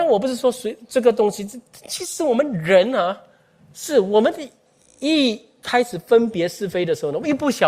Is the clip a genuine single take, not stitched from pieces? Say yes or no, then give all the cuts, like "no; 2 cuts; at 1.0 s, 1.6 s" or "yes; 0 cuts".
yes; 0 cuts